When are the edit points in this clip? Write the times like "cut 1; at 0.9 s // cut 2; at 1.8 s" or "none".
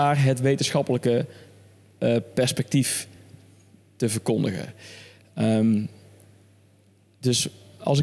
none